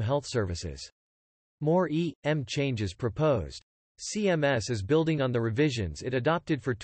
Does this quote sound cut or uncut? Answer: uncut